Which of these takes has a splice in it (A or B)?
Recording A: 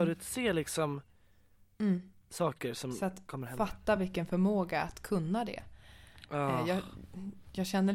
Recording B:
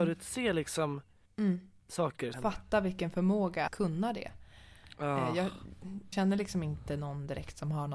B